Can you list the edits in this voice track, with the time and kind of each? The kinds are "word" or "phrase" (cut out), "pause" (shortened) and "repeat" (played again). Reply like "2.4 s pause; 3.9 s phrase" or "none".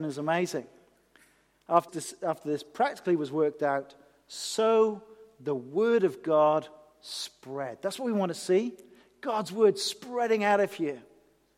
1.9 s word